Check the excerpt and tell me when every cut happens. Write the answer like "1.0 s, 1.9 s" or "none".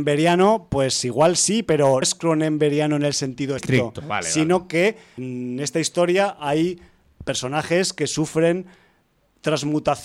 2.0 s, 3.6 s, 5.2 s